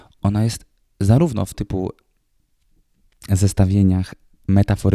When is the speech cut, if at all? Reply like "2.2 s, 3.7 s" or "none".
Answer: 1.5 s

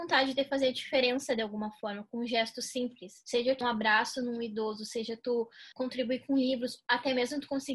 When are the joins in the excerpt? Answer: 3.6 s, 5.7 s

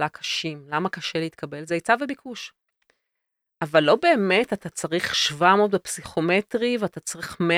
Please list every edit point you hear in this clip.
none

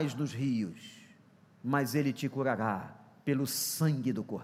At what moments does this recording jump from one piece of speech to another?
1.3 s

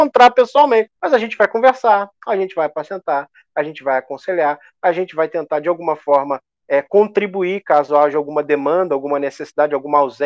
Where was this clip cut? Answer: 1.0 s

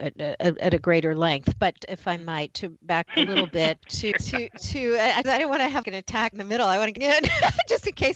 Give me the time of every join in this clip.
1.8 s, 2.5 s, 3.1 s, 3.8 s, 4.1 s, 5.2 s, 5.8 s, 6.3 s, 7.0 s

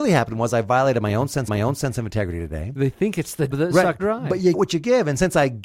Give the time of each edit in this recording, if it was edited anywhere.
1.5 s, 3.5 s, 4.0 s, 4.5 s

